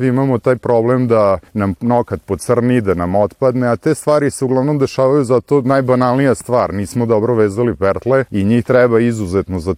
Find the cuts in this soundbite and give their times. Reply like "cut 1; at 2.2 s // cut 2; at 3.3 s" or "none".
cut 1; at 1.5 s // cut 2; at 8.3 s